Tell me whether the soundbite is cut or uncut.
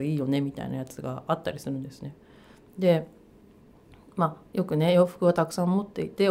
cut